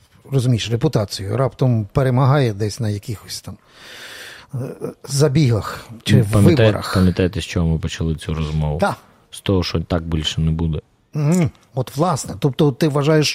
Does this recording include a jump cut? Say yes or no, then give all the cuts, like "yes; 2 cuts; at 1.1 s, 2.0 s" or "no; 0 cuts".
no; 0 cuts